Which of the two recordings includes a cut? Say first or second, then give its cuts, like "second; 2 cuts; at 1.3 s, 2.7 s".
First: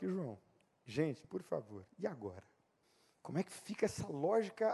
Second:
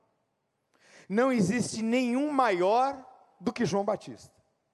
first; 2 cuts; at 1.2 s, 2.8 s